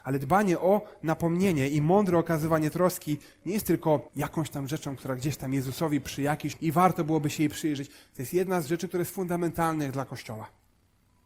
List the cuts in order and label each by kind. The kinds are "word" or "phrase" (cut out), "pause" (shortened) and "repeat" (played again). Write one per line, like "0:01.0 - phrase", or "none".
0:04.1 - pause
0:06.5 - phrase